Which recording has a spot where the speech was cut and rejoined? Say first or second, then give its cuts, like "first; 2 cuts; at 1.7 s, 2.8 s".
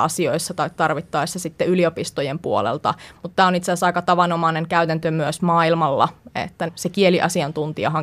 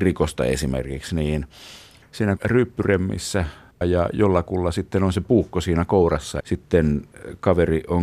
second; 3 cuts; at 2.4 s, 3.8 s, 6.4 s